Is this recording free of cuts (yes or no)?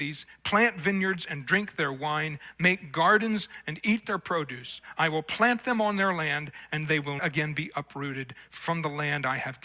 no